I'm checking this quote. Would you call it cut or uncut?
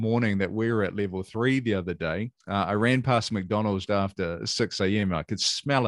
cut